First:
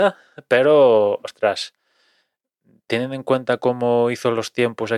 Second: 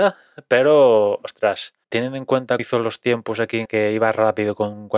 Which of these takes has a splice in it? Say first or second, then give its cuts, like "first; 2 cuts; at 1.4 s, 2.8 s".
second; 3 cuts; at 1.8 s, 2.6 s, 3.7 s